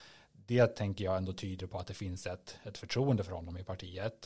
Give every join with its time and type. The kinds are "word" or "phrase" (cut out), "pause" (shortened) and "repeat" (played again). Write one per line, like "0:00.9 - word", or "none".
none